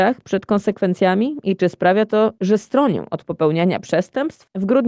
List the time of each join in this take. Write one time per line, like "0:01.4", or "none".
none